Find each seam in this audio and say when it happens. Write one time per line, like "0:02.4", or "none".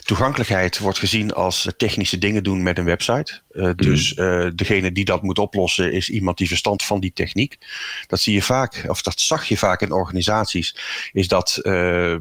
0:01.7
0:06.8